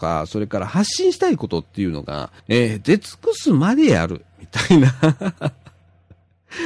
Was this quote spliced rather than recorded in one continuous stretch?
yes; 1 cut; at 2.4 s

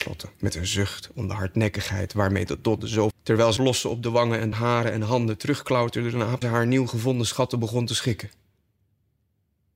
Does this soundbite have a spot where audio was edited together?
yes; 4 cuts; at 3.1 s, 3.6 s, 4.5 s, 6.4 s

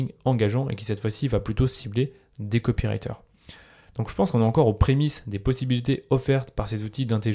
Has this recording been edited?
no; 0 cuts

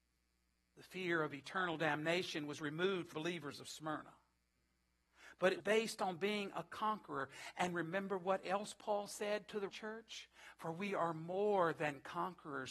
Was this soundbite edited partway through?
yes; 3 cuts; at 3.1 s, 5.6 s, 9.7 s

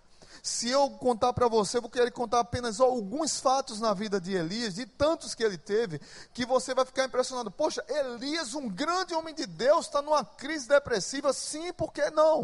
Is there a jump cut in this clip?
no; 0 cuts

